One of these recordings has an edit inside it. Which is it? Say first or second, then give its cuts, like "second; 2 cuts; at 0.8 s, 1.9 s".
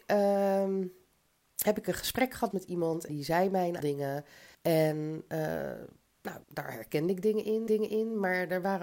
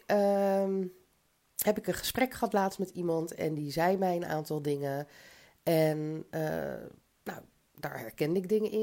first; 6 cuts; at 2.5 s, 3.1 s, 3.8 s, 4.5 s, 6.4 s, 7.7 s